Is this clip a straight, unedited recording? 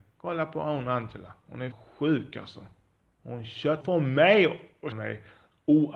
no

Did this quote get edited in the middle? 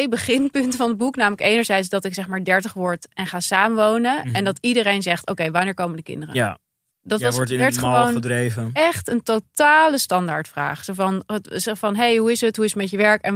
no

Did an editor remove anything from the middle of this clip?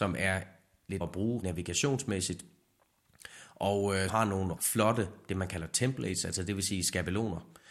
yes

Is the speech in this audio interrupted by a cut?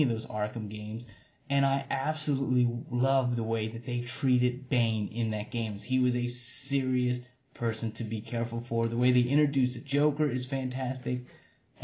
no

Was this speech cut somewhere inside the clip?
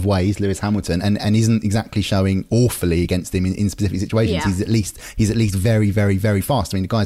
no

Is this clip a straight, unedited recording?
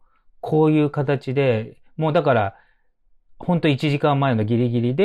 yes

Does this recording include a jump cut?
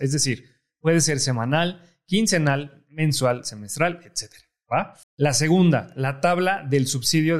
yes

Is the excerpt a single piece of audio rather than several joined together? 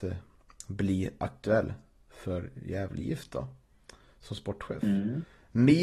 yes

